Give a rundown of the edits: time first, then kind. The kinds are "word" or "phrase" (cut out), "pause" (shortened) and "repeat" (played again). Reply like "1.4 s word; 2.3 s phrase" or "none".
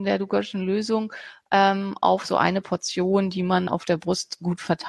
3.7 s word

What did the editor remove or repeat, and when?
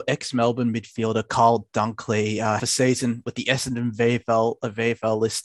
2.6 s phrase

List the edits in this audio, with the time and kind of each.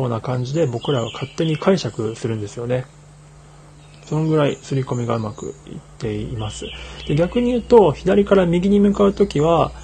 none

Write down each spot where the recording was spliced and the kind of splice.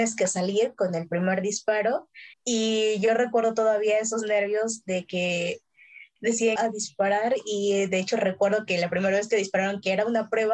2.3 s pause; 6.6 s phrase

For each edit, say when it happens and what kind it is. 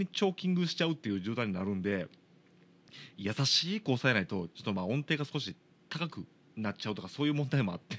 none

